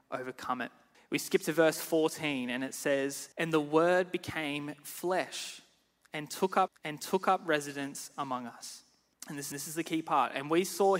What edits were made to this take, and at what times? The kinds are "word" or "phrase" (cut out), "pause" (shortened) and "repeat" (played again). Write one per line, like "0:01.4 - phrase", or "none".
0:00.9 - pause
0:03.3 - pause
0:06.7 - repeat
0:09.1 - pause
0:09.5 - repeat